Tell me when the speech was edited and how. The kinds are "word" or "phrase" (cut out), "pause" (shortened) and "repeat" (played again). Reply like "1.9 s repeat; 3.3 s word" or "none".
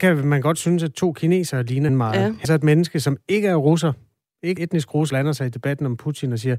1.9 s word; 2.4 s word; 4.6 s word; 5.1 s word